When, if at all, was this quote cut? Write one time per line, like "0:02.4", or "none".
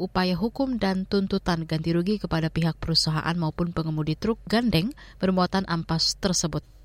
none